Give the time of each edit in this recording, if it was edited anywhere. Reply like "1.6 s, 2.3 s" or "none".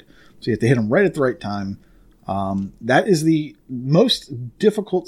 none